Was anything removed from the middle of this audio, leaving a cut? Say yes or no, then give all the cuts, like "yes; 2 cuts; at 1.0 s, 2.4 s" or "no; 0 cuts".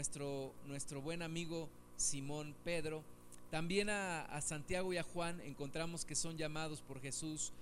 no; 0 cuts